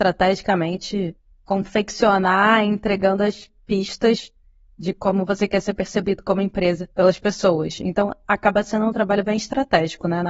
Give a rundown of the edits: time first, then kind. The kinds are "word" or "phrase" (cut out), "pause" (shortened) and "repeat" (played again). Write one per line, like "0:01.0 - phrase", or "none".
0:06.9 - pause